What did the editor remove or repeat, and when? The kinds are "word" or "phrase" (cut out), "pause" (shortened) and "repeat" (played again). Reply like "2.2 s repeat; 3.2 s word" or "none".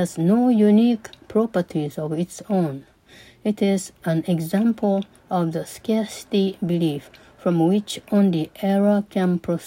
none